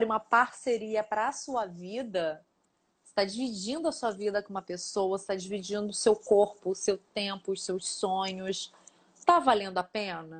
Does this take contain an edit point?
no; 0 cuts

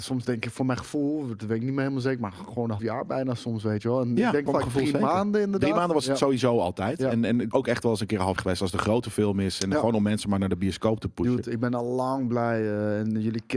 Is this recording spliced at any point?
yes; 4 cuts; at 2.8 s, 4.5 s, 7.5 s, 8.4 s

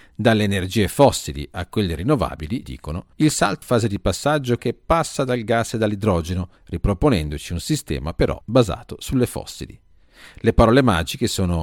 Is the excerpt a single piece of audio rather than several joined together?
no; 6 cuts; at 2.6 s, 3.1 s, 3.6 s, 4.6 s, 6.6 s, 8.4 s

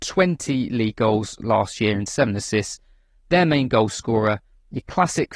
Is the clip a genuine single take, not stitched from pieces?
yes; 0 cuts

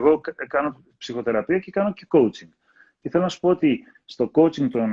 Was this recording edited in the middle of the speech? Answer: no; 0 cuts

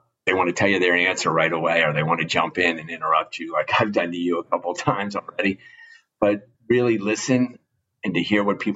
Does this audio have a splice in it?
no; 0 cuts

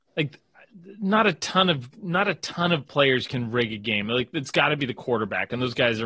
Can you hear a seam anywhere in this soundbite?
no; 0 cuts

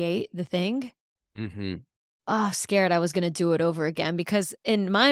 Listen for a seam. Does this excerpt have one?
yes; 1 cut; at 2.5 s

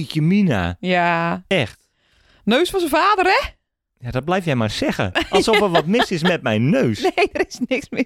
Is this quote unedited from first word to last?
yes; 0 cuts

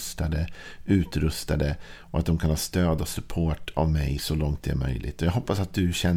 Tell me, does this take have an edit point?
no; 0 cuts

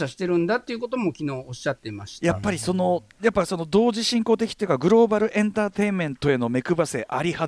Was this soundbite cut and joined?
no; 0 cuts

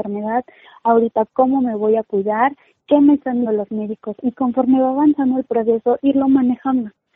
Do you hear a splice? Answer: yes; 2 cuts; at 3.4 s, 4.2 s

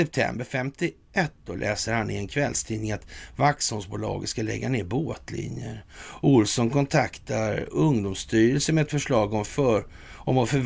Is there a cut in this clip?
no; 0 cuts

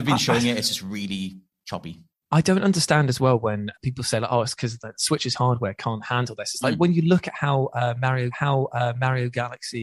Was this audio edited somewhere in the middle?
yes; 2 cuts; at 3.7 s, 8.3 s

